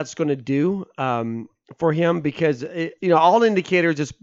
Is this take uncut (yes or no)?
no